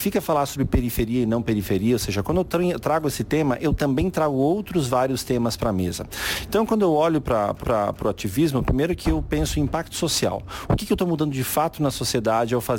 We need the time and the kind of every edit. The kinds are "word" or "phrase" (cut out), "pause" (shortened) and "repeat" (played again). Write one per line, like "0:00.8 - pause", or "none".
0:07.6 - repeat